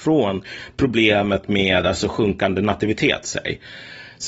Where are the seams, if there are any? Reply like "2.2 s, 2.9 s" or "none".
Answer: none